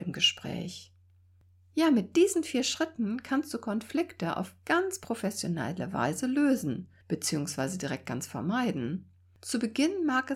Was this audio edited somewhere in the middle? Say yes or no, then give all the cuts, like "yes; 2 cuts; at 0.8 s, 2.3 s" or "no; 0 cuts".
no; 0 cuts